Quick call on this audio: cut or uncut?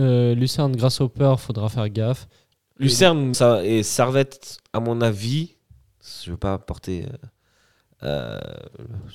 cut